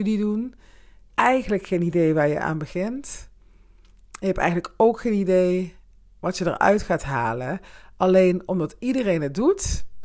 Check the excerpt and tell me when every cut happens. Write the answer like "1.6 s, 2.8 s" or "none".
1.1 s